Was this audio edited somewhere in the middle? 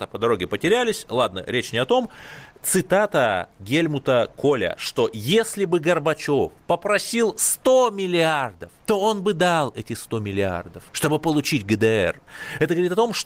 yes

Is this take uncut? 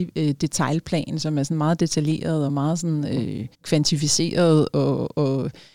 no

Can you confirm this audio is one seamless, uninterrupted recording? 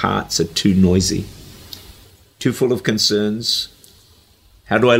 yes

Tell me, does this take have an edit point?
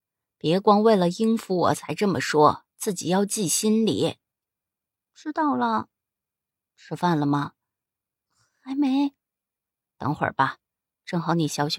no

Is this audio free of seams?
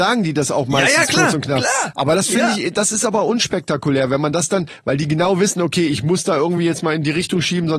yes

